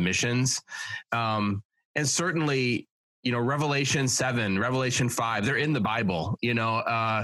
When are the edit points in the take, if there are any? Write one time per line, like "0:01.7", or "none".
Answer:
none

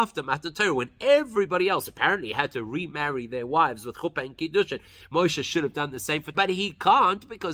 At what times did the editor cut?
0:06.3

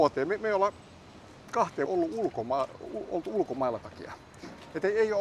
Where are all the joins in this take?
0:01.9
0:03.8

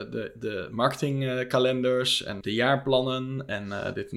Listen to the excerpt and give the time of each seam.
0:02.4

